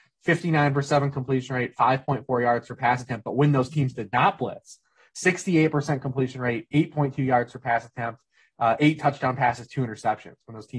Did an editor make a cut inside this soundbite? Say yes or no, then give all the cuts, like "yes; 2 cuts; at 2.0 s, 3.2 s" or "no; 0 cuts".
no; 0 cuts